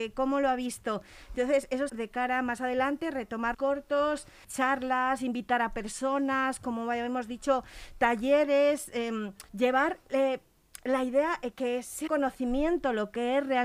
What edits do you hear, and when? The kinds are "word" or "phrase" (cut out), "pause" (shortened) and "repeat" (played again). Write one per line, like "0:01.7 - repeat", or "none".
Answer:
0:01.9 - word
0:03.5 - word
0:04.4 - word
0:09.5 - pause
0:11.5 - word
0:12.1 - word